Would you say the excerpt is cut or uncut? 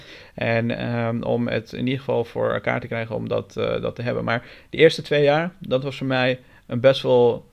uncut